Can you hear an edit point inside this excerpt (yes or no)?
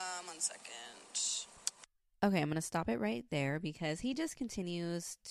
no